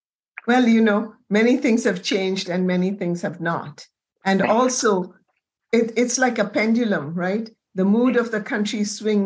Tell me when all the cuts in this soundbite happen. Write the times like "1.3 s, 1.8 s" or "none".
none